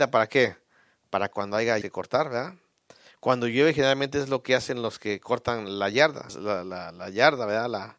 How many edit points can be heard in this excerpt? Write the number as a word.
two